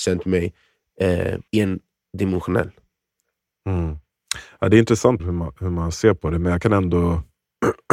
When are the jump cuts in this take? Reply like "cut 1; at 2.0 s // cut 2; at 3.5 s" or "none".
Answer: cut 1; at 1.5 s // cut 2; at 5.2 s